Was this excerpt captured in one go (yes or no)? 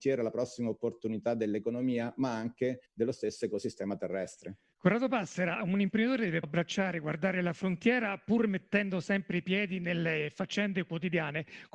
no